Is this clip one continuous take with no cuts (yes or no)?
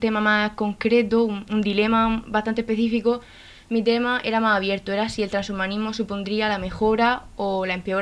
yes